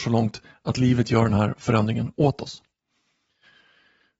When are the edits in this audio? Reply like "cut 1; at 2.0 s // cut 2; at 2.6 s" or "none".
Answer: none